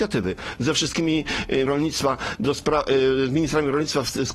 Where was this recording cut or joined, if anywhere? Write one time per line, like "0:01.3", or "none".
0:01.7